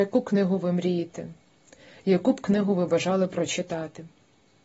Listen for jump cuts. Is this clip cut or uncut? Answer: uncut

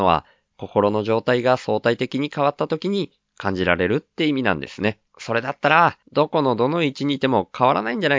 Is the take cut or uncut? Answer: cut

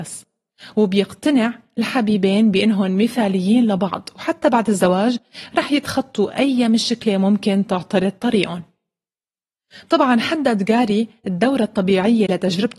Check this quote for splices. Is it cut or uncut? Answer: uncut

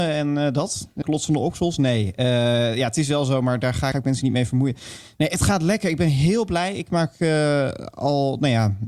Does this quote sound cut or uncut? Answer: cut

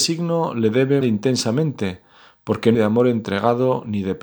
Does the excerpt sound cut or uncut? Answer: cut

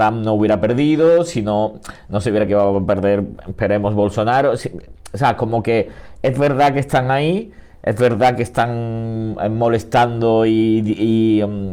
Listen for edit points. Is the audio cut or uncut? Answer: uncut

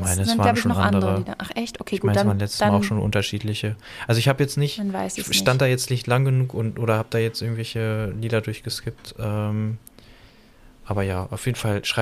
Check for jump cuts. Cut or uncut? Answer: uncut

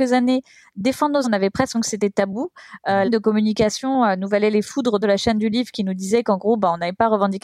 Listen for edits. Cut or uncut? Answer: cut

